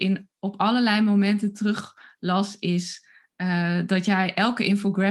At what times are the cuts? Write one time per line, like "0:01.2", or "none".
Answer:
none